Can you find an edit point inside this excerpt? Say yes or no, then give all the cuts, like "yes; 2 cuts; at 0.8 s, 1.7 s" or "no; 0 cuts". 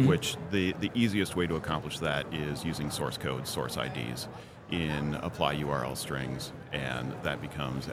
no; 0 cuts